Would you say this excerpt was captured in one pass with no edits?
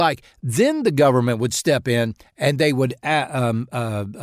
yes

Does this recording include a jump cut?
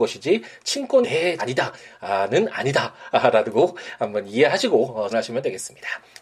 yes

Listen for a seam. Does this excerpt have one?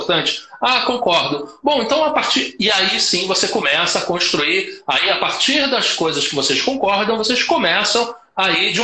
no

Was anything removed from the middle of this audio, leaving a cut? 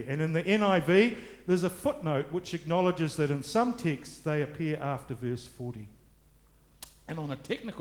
no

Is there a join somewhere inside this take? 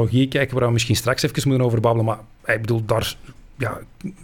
no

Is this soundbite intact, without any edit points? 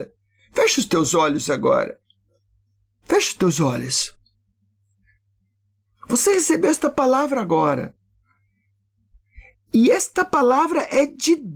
yes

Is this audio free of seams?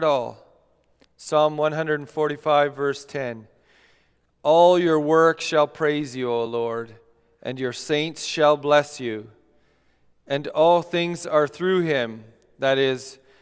yes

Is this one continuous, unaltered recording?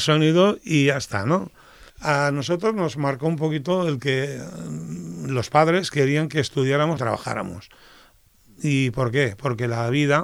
no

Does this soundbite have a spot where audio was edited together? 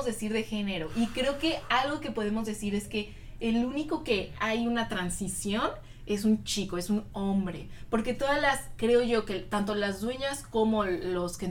no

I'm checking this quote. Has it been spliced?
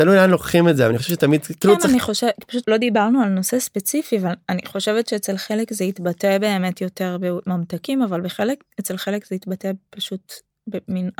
yes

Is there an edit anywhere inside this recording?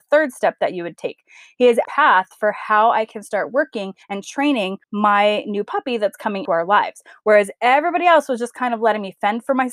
yes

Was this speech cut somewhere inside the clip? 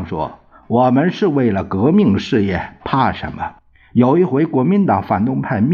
yes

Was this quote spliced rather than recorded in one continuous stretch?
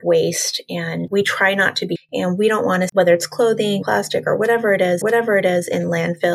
yes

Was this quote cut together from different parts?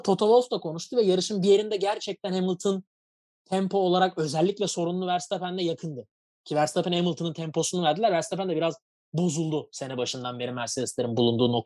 no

